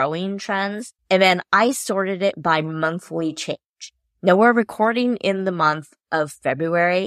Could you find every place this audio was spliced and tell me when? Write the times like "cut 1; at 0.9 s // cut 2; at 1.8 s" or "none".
cut 1; at 1.0 s